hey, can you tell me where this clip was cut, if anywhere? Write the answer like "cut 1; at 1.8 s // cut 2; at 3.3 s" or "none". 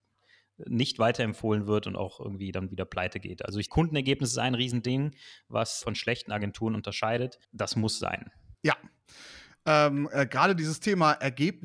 cut 1; at 3.7 s // cut 2; at 5.8 s // cut 3; at 7.4 s // cut 4; at 8.5 s